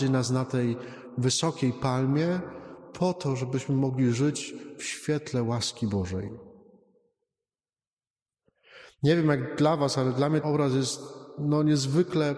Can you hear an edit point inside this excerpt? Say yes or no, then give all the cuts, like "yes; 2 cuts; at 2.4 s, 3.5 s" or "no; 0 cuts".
yes; 1 cut; at 10.4 s